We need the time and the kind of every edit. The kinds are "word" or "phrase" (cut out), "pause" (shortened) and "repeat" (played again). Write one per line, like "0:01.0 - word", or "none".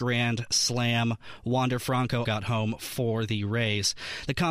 0:02.2 - word

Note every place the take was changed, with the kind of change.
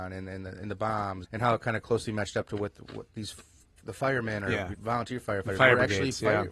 0:01.2 - word
0:03.8 - word
0:04.7 - word

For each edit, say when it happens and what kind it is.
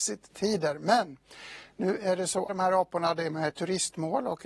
0:02.5 - phrase
0:03.5 - word

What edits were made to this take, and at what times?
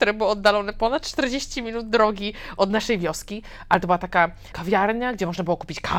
0:04.5 - word

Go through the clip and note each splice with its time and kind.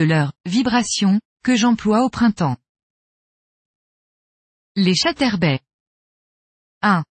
none

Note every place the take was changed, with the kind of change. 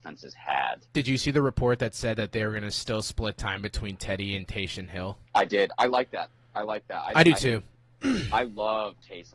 0:05.3 - pause

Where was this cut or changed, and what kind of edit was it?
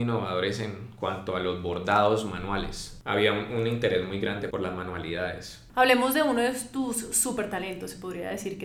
0:04.5 - word

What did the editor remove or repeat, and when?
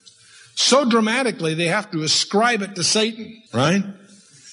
0:03.5 - pause

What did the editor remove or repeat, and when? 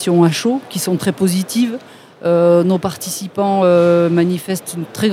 none

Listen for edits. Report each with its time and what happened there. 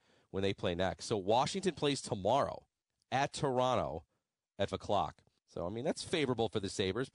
0:02.8 - pause
0:04.7 - word
0:05.4 - pause

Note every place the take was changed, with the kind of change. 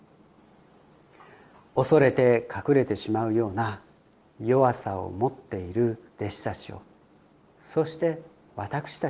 0:06.1 - pause

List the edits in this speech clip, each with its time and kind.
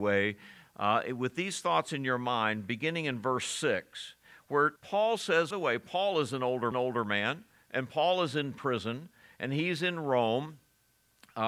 0:04.8 - pause
0:05.5 - phrase
0:06.7 - repeat

